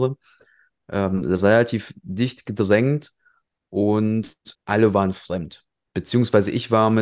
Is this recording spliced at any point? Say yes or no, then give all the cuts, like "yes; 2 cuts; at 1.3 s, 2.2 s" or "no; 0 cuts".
yes; 1 cut; at 4.5 s